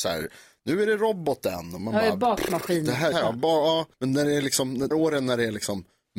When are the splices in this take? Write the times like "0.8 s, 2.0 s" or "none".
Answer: 3.1 s, 3.9 s, 4.9 s